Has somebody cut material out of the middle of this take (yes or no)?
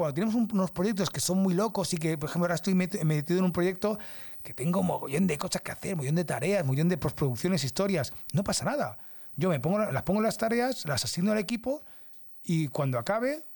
no